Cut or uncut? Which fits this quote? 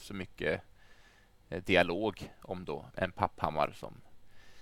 cut